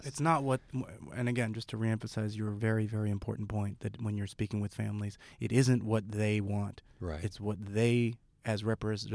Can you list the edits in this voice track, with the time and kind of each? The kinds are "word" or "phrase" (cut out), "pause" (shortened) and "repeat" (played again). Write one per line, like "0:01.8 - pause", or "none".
none